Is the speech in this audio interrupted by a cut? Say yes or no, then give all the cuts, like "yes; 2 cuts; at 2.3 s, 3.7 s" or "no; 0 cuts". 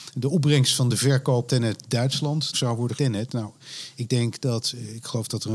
yes; 3 cuts; at 1.5 s, 2.5 s, 3.0 s